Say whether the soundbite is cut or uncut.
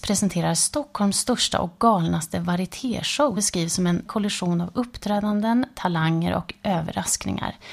cut